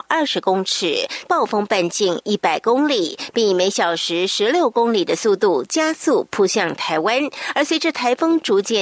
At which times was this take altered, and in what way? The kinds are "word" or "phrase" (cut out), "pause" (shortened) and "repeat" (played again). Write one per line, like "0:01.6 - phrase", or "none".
0:01.3 - phrase